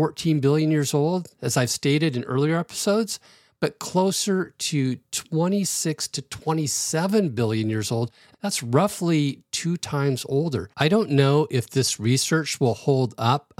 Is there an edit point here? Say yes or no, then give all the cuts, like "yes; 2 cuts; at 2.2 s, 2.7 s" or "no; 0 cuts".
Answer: yes; 1 cut; at 10.7 s